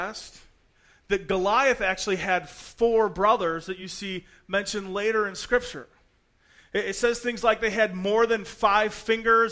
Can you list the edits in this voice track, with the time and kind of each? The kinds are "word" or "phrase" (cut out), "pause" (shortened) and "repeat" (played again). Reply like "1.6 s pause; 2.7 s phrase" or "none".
none